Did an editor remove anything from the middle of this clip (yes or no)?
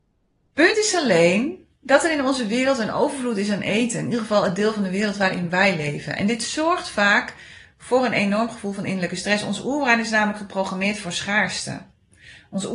yes